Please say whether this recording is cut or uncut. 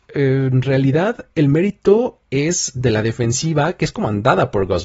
uncut